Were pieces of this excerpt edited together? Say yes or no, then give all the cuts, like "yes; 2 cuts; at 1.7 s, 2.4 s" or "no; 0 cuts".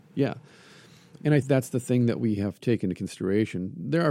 yes; 2 cuts; at 1.4 s, 2.6 s